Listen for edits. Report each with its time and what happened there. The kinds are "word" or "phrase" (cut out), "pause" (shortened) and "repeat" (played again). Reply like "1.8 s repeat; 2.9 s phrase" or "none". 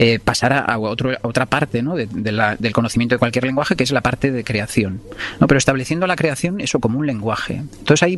none